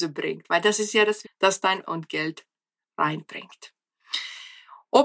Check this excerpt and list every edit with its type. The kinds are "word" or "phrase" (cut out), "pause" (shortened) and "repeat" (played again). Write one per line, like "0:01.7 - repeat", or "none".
0:01.2 - word
0:01.8 - phrase